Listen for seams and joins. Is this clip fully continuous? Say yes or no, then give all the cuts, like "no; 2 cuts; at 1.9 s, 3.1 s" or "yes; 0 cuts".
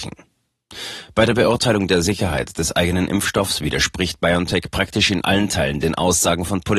yes; 0 cuts